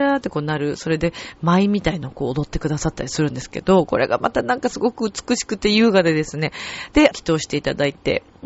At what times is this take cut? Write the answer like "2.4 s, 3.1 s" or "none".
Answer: 7.1 s